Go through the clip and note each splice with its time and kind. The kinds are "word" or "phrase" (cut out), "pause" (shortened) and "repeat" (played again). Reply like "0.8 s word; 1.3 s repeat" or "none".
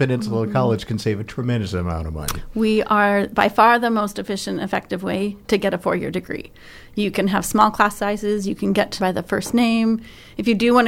9.0 s phrase